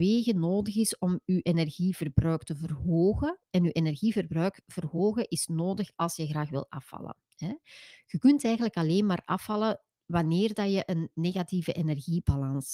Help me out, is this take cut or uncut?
uncut